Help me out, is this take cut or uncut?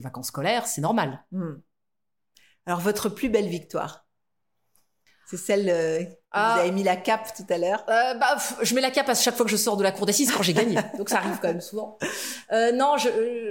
uncut